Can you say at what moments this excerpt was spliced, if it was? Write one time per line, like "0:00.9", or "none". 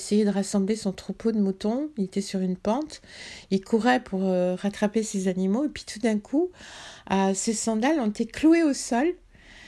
none